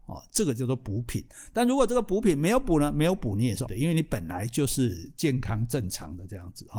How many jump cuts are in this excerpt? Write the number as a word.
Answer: one